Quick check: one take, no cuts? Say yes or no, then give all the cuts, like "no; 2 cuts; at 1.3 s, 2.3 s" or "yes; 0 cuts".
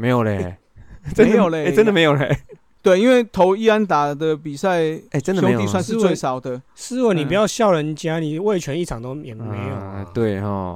yes; 0 cuts